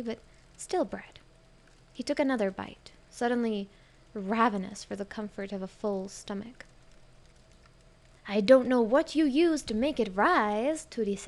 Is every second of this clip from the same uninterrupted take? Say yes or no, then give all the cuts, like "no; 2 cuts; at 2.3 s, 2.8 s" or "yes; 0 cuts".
yes; 0 cuts